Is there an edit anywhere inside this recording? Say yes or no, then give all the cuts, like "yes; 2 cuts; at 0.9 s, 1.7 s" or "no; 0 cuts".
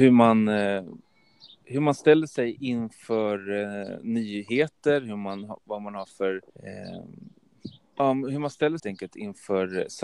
yes; 2 cuts; at 6.5 s, 8.8 s